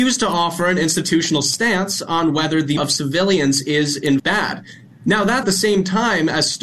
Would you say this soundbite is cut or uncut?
cut